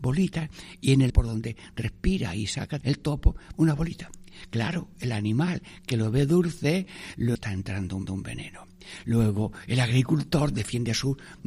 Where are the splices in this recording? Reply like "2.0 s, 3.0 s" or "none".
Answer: 1.1 s, 2.8 s, 3.5 s, 7.4 s, 8.1 s